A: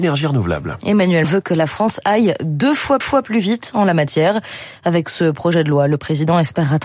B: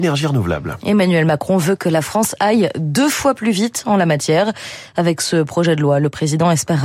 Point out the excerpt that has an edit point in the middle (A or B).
A